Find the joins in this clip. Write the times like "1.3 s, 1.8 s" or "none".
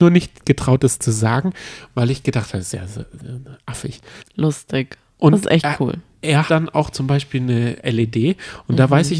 4.2 s, 6.5 s